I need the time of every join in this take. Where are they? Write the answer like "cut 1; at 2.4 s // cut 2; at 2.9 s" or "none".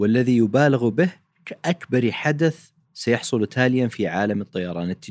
none